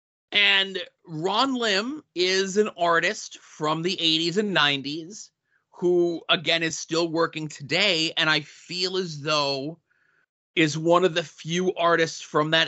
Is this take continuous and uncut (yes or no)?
yes